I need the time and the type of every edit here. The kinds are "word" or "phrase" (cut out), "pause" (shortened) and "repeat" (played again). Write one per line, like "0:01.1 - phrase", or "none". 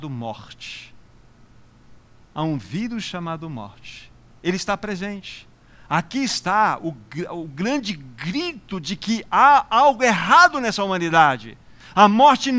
none